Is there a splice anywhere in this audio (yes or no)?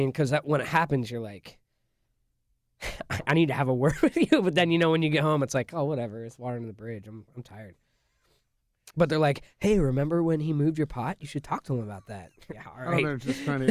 yes